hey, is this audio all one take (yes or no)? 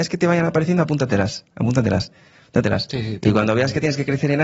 yes